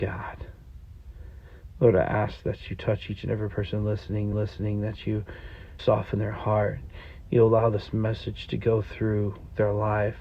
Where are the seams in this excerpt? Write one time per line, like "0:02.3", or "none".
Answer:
0:04.3
0:05.8